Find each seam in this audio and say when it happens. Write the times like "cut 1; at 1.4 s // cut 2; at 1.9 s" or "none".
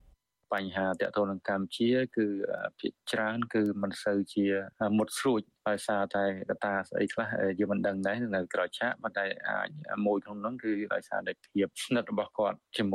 cut 1; at 11.7 s